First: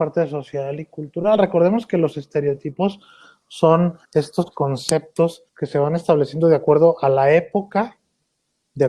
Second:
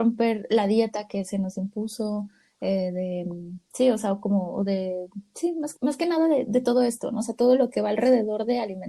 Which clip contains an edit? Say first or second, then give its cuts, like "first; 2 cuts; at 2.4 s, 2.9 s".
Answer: first; 2 cuts; at 4.0 s, 5.5 s